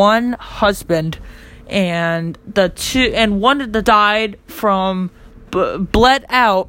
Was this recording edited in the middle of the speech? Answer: yes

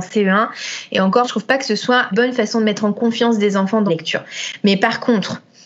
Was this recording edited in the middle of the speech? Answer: yes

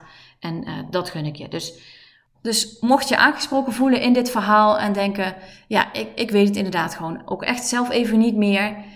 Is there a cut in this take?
no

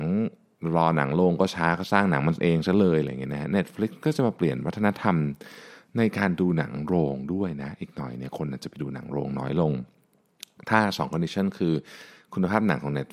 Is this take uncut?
yes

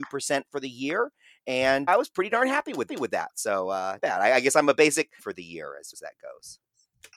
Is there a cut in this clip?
yes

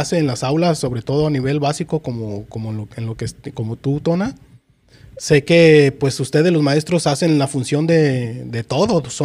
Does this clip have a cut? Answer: no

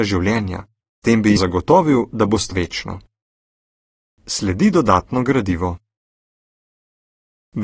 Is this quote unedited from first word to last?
no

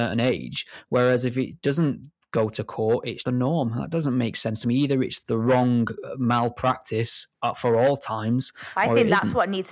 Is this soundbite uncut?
no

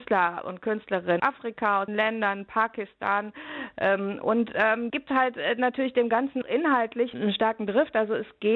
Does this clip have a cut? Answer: yes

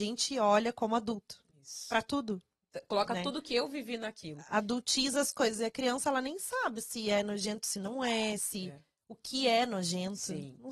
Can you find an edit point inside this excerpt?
no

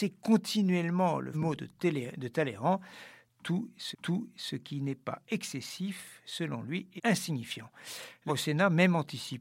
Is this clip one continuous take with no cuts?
no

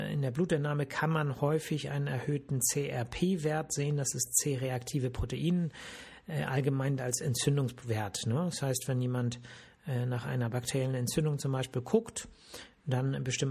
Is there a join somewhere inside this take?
yes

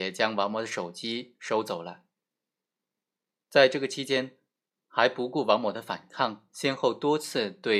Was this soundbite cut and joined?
no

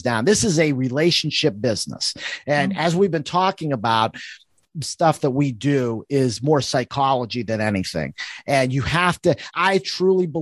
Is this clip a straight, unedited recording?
no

